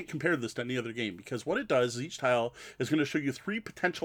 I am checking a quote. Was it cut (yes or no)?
no